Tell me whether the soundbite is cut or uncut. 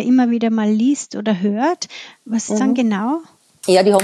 cut